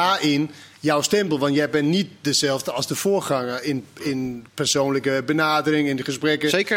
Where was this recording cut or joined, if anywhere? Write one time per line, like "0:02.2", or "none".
0:04.5

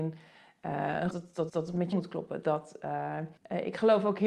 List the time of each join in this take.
0:01.1
0:01.5
0:01.9
0:03.4

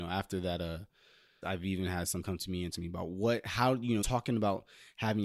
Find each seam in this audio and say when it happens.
0:01.4
0:02.2
0:02.7
0:04.0

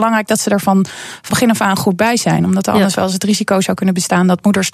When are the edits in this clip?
0:01.3

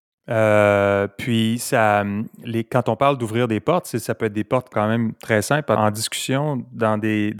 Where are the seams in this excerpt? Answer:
0:04.7
0:05.8

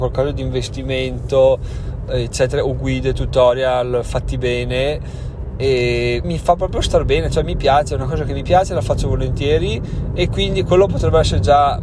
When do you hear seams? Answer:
0:06.2

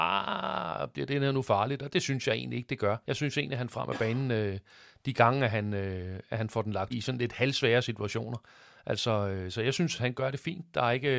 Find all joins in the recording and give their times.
0:03.0
0:03.7
0:06.9

